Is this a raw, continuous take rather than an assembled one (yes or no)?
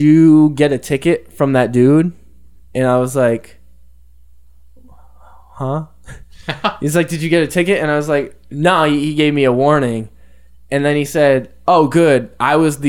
yes